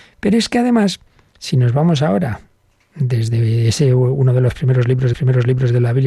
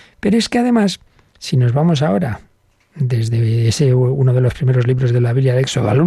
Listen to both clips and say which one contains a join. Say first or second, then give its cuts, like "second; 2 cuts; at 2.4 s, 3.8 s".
first; 1 cut; at 5.1 s